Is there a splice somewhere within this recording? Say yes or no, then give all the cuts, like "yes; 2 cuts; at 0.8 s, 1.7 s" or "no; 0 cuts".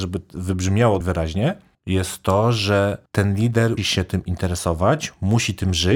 yes; 4 cuts; at 1.0 s, 1.7 s, 3.1 s, 3.8 s